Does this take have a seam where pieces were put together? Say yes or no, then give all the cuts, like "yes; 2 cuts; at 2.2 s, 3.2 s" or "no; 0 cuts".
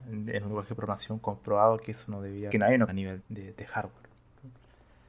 yes; 3 cuts; at 2.5 s, 2.9 s, 3.2 s